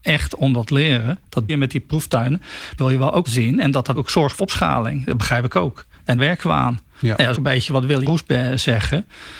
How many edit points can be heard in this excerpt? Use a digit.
8